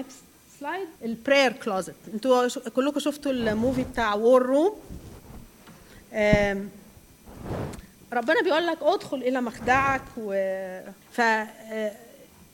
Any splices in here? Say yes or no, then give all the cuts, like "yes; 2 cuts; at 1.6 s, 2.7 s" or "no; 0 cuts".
yes; 2 cuts; at 1.0 s, 11.0 s